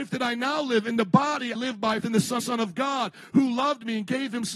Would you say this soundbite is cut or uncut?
cut